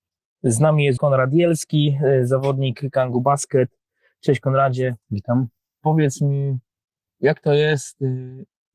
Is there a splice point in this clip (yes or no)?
yes